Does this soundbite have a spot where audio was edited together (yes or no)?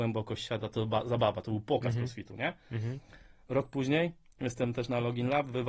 no